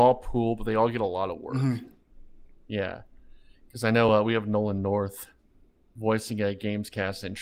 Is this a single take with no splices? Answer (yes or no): yes